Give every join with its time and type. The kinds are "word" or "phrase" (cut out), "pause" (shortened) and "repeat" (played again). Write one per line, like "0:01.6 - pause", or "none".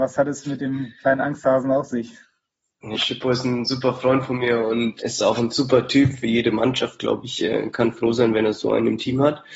0:02.9 - word
0:05.0 - word